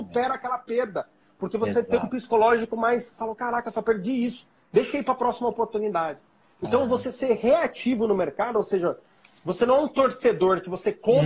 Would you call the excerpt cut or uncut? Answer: uncut